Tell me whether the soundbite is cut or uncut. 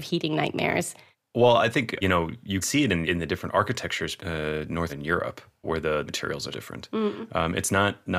cut